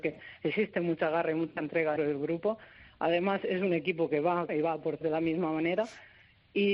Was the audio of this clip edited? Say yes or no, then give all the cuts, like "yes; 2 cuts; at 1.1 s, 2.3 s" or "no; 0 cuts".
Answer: yes; 3 cuts; at 2.0 s, 4.5 s, 5.0 s